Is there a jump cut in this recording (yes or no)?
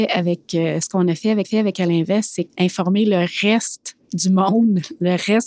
yes